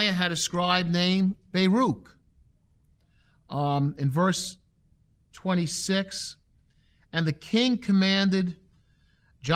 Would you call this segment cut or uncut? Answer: uncut